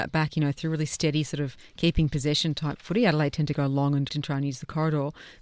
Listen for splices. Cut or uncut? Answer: cut